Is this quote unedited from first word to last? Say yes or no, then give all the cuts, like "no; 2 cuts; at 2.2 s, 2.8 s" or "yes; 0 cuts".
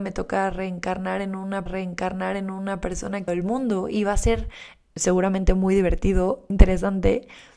no; 3 cuts; at 1.7 s, 3.3 s, 6.5 s